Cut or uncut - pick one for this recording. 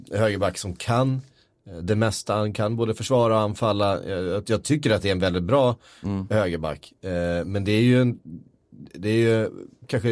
uncut